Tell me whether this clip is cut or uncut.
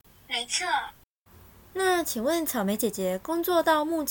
uncut